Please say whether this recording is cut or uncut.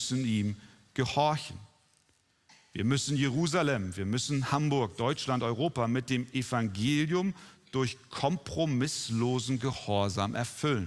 uncut